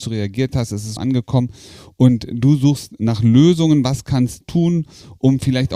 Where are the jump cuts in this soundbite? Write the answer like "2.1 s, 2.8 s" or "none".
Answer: 1.0 s, 4.4 s